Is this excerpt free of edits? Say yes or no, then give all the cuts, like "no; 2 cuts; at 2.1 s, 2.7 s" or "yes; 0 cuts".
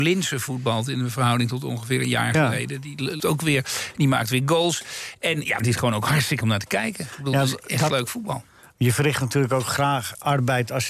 no; 3 cuts; at 3.2 s, 5.6 s, 6.4 s